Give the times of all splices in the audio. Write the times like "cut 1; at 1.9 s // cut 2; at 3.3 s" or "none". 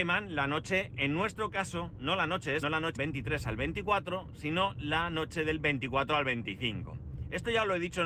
cut 1; at 2.6 s // cut 2; at 3.0 s

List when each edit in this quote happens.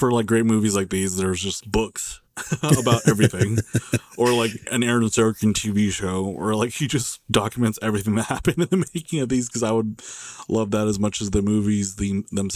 cut 1; at 1.6 s

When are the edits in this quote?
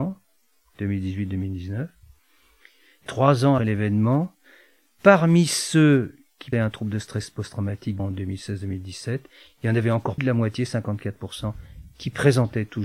cut 1; at 3.1 s // cut 2; at 3.6 s // cut 3; at 6.5 s // cut 4; at 8.0 s // cut 5; at 10.2 s

